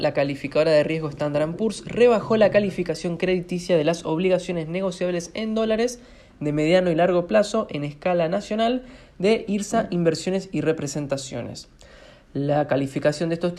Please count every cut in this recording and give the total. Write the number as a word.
zero